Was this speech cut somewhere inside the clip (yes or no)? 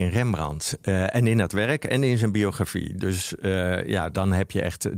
no